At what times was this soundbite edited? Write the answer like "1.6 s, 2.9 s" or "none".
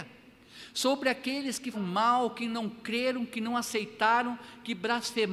1.7 s